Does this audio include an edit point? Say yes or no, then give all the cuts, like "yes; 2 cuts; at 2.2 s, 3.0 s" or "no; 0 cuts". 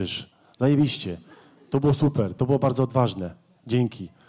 no; 0 cuts